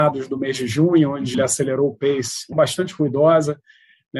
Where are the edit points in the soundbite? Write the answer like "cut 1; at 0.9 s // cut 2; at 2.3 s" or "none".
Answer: cut 1; at 1.3 s // cut 2; at 2.5 s